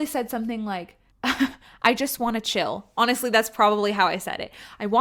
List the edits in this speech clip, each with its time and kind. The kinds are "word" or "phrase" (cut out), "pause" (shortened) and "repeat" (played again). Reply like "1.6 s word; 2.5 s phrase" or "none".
1.1 s pause